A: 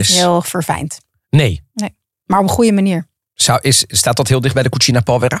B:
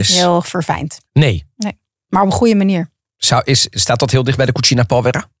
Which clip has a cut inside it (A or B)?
B